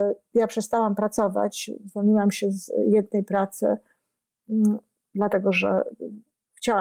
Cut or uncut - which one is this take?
uncut